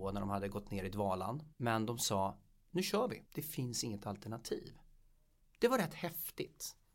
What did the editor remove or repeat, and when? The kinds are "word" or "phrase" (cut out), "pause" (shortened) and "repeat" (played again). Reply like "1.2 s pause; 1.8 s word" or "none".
1.5 s pause; 3.3 s pause